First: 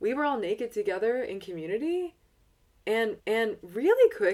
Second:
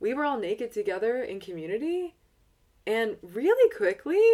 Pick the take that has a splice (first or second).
first